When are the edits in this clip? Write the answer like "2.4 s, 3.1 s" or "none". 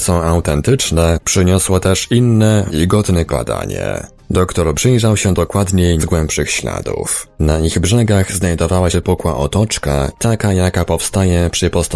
2.7 s, 3.3 s, 4.7 s, 6.0 s, 8.9 s